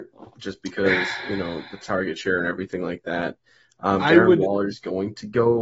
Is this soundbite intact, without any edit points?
yes; 0 cuts

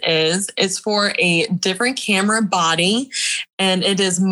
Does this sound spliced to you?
no; 0 cuts

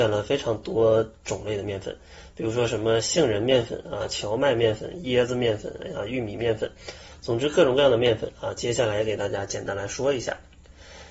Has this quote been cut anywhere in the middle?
no; 0 cuts

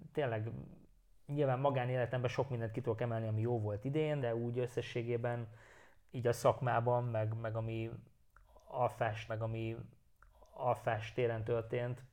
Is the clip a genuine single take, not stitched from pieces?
no; 2 cuts; at 4.2 s, 9.3 s

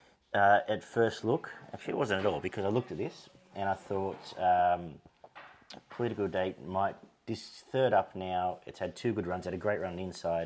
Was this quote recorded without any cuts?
yes; 0 cuts

